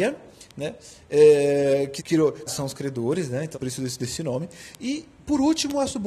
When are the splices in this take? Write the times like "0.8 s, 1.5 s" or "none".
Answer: 2.0 s, 2.5 s, 3.5 s

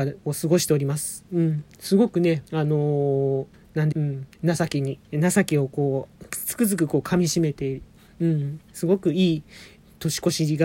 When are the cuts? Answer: 2.5 s, 3.5 s, 3.9 s, 4.3 s, 5.0 s, 8.6 s

